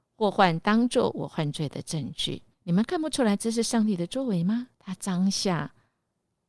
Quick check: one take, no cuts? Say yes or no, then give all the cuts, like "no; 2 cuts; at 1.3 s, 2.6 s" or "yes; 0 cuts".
no; 2 cuts; at 2.5 s, 4.7 s